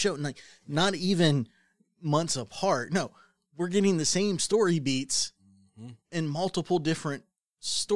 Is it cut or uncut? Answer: uncut